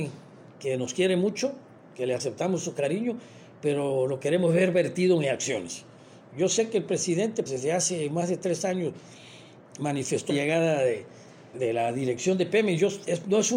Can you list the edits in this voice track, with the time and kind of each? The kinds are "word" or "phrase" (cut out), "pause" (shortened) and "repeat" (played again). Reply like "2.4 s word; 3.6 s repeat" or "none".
7.5 s word; 10.3 s word; 11.5 s word